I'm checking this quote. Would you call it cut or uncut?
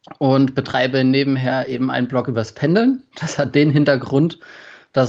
uncut